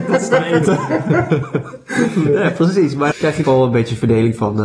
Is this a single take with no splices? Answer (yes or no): no